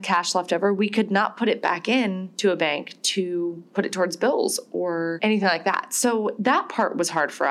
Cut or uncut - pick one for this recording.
uncut